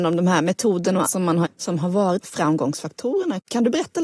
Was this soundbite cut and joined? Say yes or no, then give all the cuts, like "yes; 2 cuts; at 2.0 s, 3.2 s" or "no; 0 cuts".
yes; 3 cuts; at 1.0 s, 1.4 s, 2.2 s